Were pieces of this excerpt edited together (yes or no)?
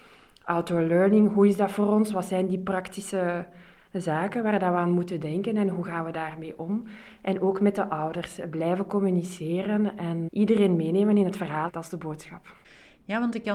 no